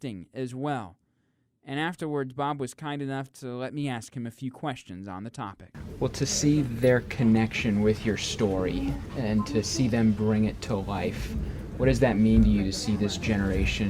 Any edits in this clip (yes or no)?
no